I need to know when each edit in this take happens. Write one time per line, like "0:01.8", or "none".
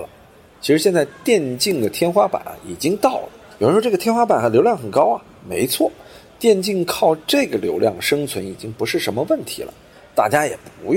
none